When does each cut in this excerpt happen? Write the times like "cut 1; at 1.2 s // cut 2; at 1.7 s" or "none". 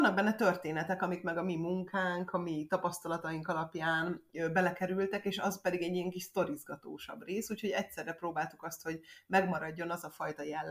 none